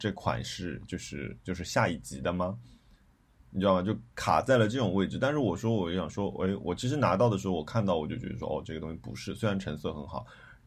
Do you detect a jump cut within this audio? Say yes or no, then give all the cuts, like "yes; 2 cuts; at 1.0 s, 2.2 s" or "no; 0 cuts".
no; 0 cuts